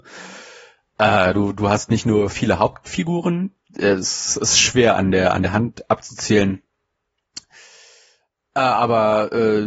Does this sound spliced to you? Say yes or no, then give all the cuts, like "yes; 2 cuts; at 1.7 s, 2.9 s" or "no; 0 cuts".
no; 0 cuts